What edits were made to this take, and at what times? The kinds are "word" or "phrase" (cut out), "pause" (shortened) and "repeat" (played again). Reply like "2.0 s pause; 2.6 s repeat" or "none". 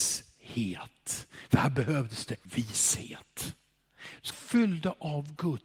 2.4 s pause; 4.3 s word